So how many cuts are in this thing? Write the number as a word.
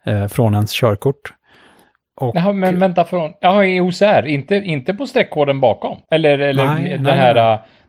one